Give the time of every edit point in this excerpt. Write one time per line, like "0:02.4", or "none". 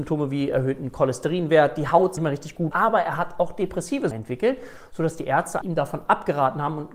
0:02.2
0:02.7
0:04.1
0:05.6